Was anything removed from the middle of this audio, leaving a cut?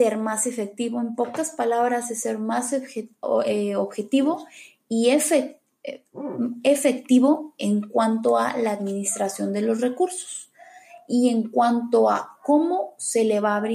no; 0 cuts

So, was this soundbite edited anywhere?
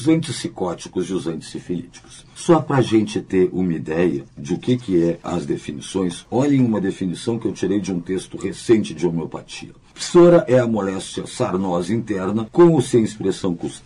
no; 0 cuts

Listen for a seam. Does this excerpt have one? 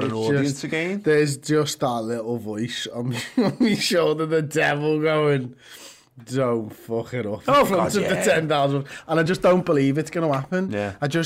no; 0 cuts

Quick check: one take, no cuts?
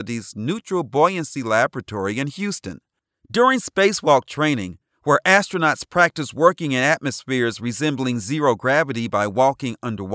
yes; 0 cuts

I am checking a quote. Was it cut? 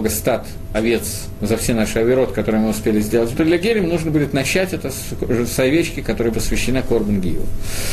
yes; 2 cuts; at 3.3 s, 6.3 s

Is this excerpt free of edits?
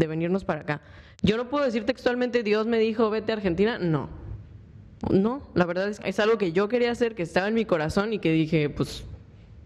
no; 1 cut; at 6.0 s

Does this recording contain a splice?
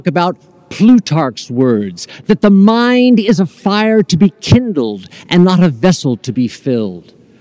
no; 0 cuts

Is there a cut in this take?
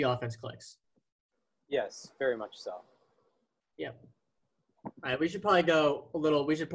no; 0 cuts

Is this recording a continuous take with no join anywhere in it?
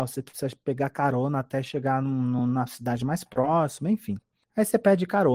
yes; 0 cuts

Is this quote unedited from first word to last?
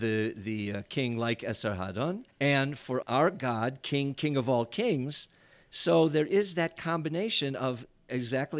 no; 2 cuts; at 2.3 s, 3.0 s

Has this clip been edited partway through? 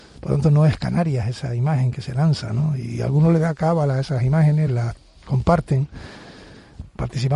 no; 0 cuts

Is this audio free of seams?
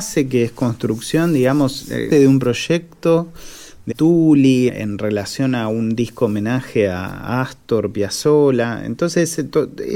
no; 3 cuts; at 2.1 s, 3.9 s, 4.7 s

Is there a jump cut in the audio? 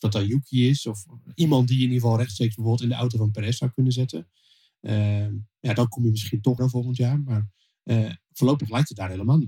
yes; 1 cut; at 6.6 s

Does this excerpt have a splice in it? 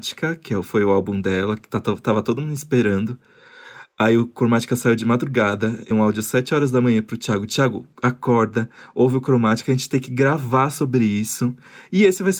yes; 2 cuts; at 5.9 s, 7.9 s

